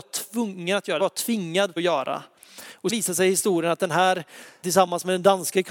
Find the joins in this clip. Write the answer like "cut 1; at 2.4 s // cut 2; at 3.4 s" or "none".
cut 1; at 1.0 s // cut 2; at 1.8 s // cut 3; at 2.9 s // cut 4; at 4.6 s